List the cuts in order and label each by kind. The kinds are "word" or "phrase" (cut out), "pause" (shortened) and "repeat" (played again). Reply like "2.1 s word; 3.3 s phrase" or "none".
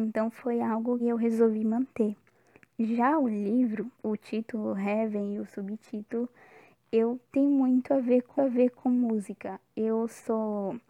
1.0 s word; 3.9 s pause; 7.2 s pause; 8.4 s repeat